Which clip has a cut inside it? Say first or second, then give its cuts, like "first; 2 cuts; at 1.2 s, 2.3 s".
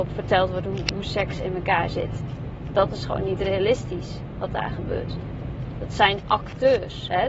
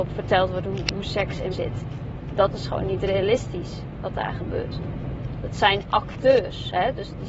second; 1 cut; at 1.5 s